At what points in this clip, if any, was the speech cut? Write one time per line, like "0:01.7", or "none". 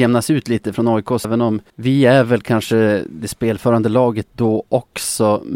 0:01.2
0:01.7